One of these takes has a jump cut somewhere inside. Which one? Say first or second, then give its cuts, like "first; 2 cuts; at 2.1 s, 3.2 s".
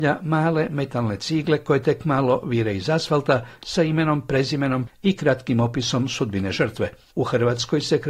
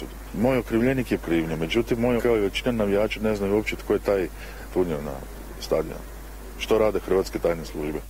second; 3 cuts; at 1.2 s, 2.2 s, 4.7 s